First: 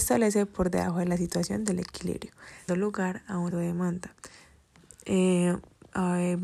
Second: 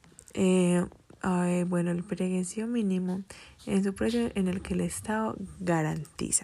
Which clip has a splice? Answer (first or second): first